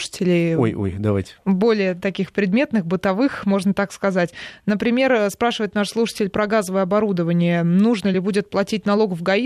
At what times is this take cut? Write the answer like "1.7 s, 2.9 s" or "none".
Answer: none